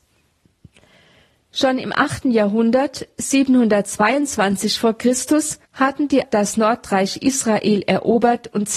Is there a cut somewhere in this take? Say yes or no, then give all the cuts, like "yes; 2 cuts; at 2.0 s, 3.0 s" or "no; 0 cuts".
yes; 2 cuts; at 5.6 s, 6.2 s